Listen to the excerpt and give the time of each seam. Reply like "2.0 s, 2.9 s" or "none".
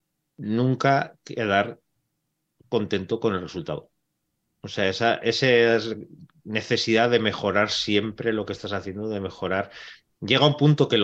none